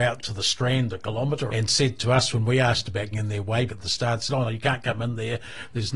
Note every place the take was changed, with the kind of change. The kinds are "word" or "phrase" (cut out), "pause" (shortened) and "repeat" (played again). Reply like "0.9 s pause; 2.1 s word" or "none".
1.5 s word; 3.1 s word; 3.7 s word